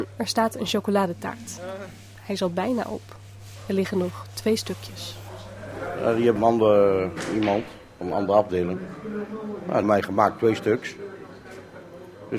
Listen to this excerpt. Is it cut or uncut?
cut